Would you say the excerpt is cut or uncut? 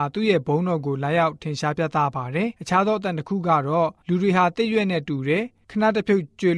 cut